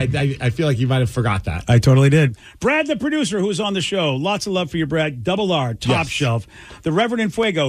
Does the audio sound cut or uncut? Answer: uncut